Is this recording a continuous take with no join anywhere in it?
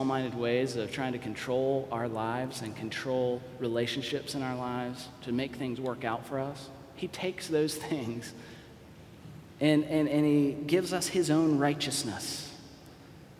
yes; 0 cuts

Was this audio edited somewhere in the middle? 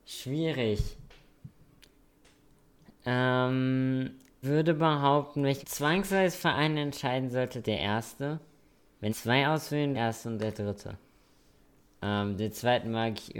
yes; 5 cuts; at 4.4 s, 5.6 s, 7.6 s, 9.1 s, 9.9 s

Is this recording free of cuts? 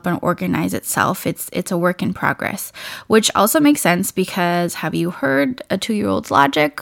yes; 0 cuts

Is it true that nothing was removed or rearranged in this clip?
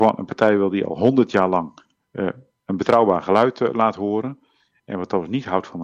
yes; 0 cuts

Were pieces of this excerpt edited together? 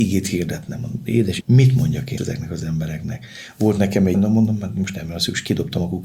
yes; 3 cuts; at 1.4 s, 2.2 s, 4.1 s

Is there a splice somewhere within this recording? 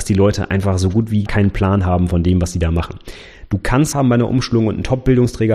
yes; 2 cuts; at 1.3 s, 3.9 s

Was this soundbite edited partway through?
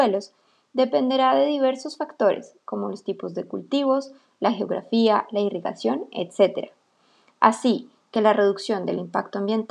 no; 0 cuts

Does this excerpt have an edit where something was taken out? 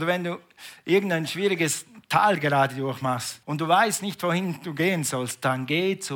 yes; 1 cut; at 3.4 s

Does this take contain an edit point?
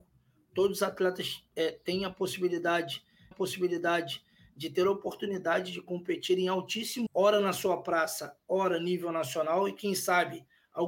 yes; 2 cuts; at 3.3 s, 7.1 s

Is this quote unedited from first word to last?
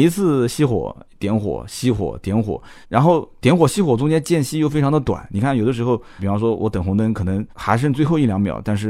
no; 3 cuts; at 2.8 s, 6.2 s, 7.5 s

